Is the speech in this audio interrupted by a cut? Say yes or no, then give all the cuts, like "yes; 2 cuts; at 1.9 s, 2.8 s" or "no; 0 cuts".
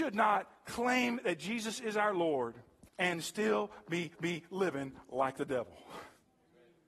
yes; 2 cuts; at 2.9 s, 4.2 s